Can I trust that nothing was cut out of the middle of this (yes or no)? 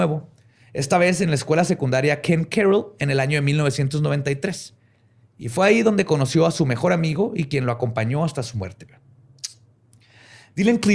yes